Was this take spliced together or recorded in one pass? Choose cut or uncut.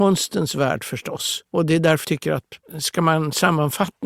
cut